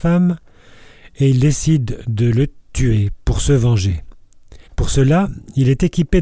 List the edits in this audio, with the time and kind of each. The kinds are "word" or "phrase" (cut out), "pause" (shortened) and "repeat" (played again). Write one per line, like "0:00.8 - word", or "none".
0:04.7 - pause

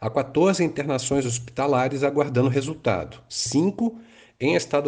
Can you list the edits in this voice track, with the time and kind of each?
none

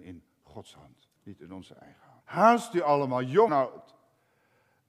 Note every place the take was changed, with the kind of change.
0:01.2 - pause
0:02.2 - pause
0:03.5 - word

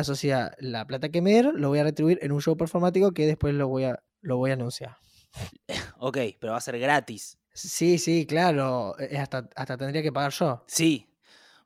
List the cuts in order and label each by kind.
0:04.1 - pause
0:07.4 - pause

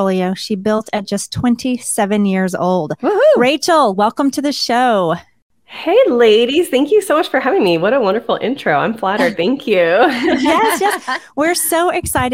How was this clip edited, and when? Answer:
none

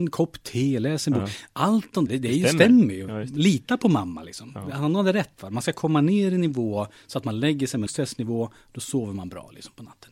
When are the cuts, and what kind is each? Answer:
0:02.1 - word
0:07.9 - word

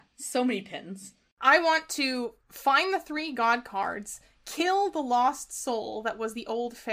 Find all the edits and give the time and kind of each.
none

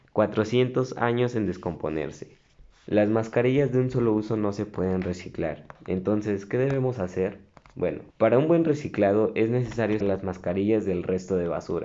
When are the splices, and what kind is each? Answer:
0:02.6 - pause
0:08.1 - pause
0:10.0 - word

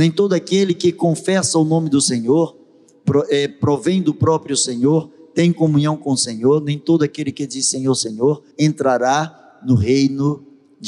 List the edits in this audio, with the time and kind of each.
0:08.5 - pause

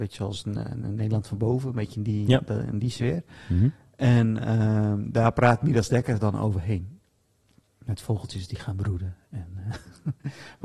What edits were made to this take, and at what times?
none

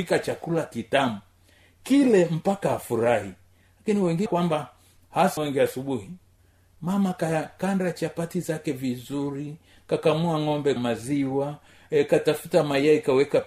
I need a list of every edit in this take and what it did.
0:04.3 - word
0:05.4 - word
0:10.8 - word

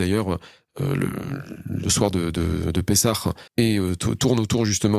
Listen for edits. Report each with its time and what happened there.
0:03.5 - pause

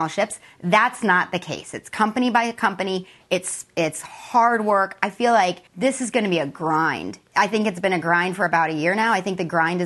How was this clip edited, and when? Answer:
0:05.7 - pause

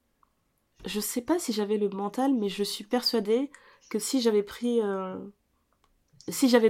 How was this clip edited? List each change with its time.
none

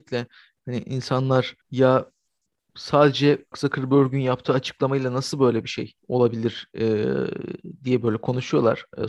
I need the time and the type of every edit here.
0:01.6 - pause
0:03.5 - word
0:06.0 - pause

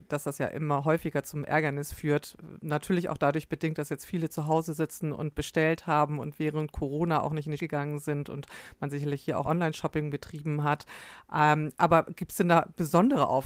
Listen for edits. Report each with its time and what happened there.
0:07.6 - word
0:09.4 - word

